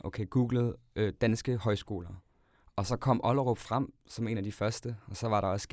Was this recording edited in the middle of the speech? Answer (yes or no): no